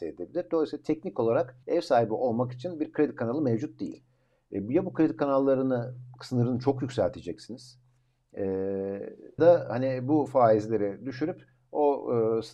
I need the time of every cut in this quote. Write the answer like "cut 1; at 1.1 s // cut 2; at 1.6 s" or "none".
cut 1; at 1.6 s // cut 2; at 9.4 s

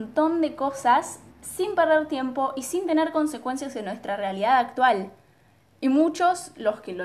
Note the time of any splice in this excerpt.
cut 1; at 1.3 s

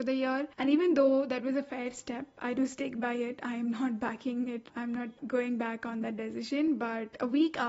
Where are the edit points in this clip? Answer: none

